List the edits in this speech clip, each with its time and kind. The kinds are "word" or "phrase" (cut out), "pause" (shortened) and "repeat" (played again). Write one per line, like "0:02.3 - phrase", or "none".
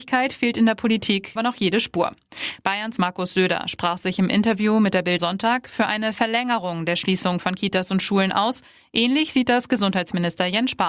0:01.4 - word
0:03.0 - word
0:05.2 - word

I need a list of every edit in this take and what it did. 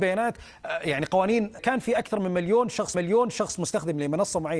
0:01.6 - phrase
0:02.9 - repeat

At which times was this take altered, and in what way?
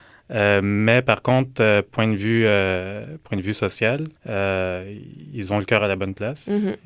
0:04.2 - pause

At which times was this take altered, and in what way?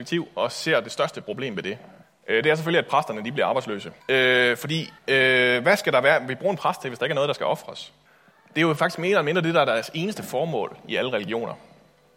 0:02.0 - pause
0:04.0 - pause
0:05.0 - pause
0:08.1 - pause

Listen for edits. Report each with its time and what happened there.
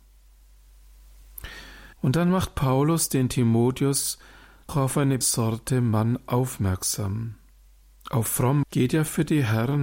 0:01.9 - pause
0:04.7 - word
0:05.2 - word
0:07.7 - pause
0:08.6 - word

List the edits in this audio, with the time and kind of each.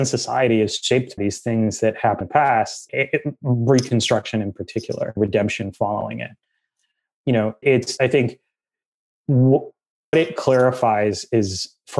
0:01.2 - word
0:02.2 - word
0:02.9 - word
0:05.2 - word
0:07.2 - word
0:07.6 - word
0:08.0 - word
0:10.1 - word

